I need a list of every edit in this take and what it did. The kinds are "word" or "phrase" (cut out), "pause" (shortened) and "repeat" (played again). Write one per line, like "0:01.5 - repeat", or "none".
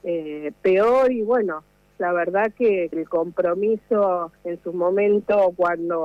0:02.9 - word
0:04.4 - pause